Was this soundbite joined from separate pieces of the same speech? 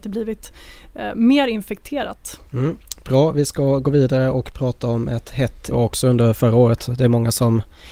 yes; 2 cuts; at 2.5 s, 5.7 s

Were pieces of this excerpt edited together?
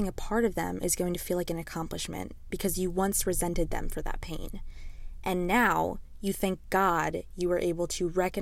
no; 0 cuts

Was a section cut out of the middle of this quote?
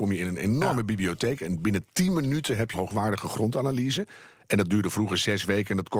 yes; 1 cut; at 2.7 s

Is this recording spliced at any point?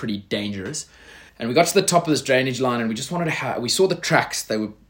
yes; 1 cut; at 1.3 s

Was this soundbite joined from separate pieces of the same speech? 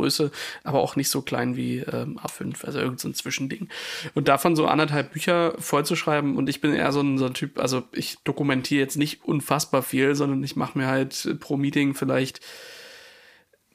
no; 0 cuts

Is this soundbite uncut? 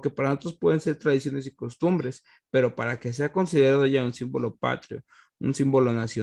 yes; 0 cuts

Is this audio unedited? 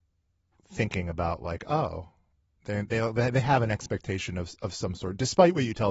yes; 0 cuts

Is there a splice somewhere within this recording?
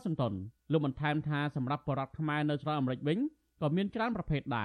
no; 0 cuts

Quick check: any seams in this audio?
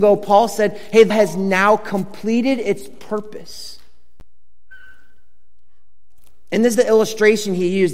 yes; 2 cuts; at 1.1 s, 6.7 s

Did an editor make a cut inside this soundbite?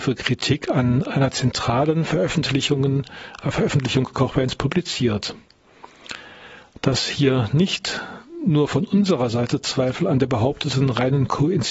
no; 0 cuts

